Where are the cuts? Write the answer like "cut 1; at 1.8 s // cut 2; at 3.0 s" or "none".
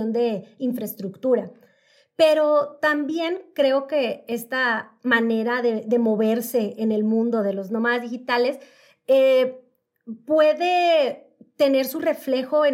none